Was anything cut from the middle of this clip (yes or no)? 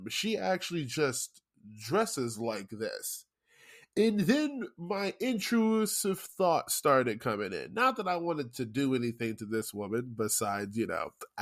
no